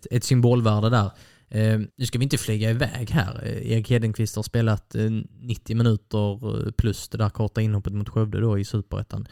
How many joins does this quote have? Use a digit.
2